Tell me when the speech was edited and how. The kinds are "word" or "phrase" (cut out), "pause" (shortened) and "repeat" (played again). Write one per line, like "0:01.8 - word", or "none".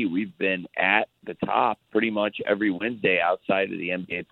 0:01.9 - pause